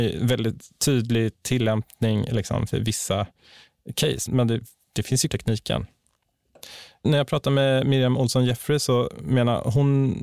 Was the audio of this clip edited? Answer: yes; 2 cuts; at 4.3 s, 5.3 s

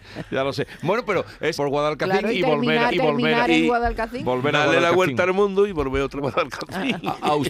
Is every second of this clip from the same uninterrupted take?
no; 3 cuts; at 1.5 s, 2.9 s, 6.2 s

